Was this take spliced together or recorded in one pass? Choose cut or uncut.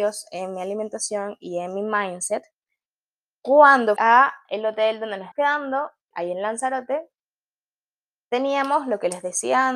cut